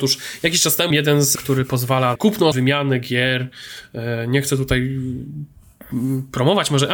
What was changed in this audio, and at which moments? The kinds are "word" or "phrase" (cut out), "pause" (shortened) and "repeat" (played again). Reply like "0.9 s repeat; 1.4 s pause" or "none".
0.9 s word; 1.4 s word; 2.2 s word; 2.5 s word